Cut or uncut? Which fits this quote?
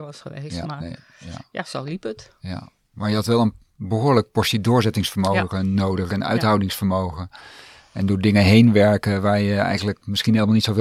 uncut